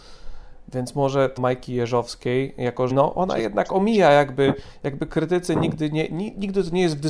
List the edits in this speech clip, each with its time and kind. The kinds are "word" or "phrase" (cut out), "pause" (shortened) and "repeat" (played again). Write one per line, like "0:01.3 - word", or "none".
0:01.4 - phrase
0:02.9 - word